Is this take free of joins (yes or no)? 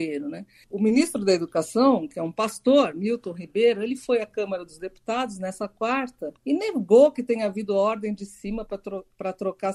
no